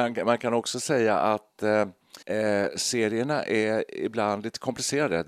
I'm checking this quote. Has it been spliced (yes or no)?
yes